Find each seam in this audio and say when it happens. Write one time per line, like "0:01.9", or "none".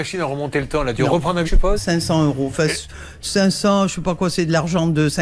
0:01.4
0:01.8